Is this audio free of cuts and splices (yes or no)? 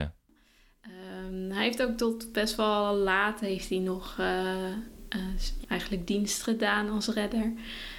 no